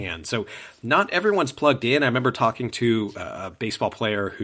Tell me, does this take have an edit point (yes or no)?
no